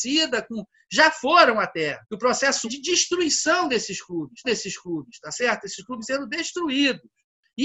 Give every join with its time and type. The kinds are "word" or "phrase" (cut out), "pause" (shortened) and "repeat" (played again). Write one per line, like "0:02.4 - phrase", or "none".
0:02.0 - pause
0:02.6 - word
0:04.4 - repeat
0:06.0 - word